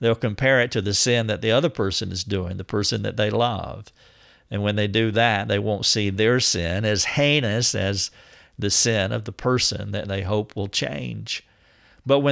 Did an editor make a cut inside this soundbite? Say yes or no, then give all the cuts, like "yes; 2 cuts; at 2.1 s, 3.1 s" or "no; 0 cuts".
no; 0 cuts